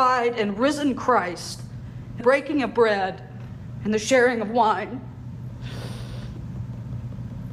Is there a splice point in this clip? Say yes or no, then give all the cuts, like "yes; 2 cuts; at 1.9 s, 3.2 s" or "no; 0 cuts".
yes; 1 cut; at 2.2 s